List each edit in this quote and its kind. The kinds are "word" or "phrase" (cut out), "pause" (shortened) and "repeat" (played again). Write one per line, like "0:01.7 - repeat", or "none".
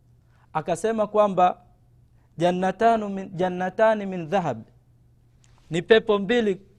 none